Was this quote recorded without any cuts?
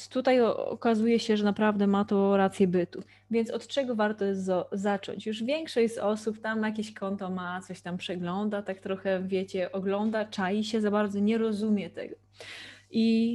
yes; 0 cuts

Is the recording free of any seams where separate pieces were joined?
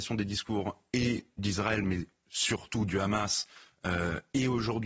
yes; 0 cuts

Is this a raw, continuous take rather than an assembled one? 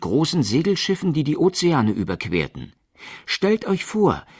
yes; 0 cuts

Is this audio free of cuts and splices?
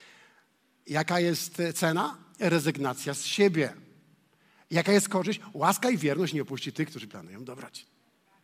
yes; 0 cuts

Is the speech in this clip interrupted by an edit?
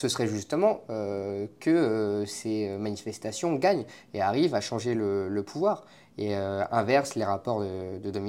no; 0 cuts

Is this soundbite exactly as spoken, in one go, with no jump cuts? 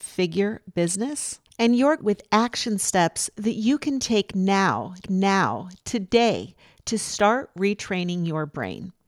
no; 2 cuts; at 2.0 s, 5.0 s

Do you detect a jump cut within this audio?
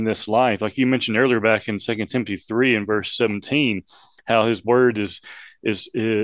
no; 0 cuts

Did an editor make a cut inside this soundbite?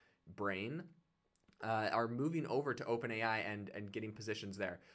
no; 0 cuts

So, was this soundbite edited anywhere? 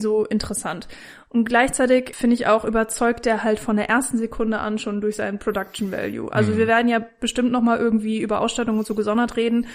no; 0 cuts

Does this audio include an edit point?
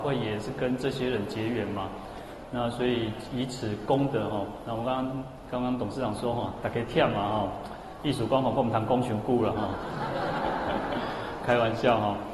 yes; 1 cut; at 11.4 s

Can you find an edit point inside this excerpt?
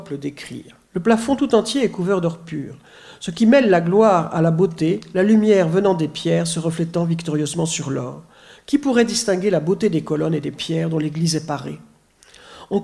no; 0 cuts

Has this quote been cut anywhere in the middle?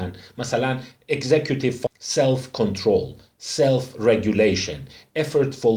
yes; 1 cut; at 1.9 s

